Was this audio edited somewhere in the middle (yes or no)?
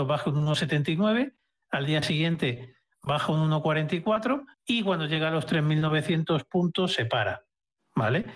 yes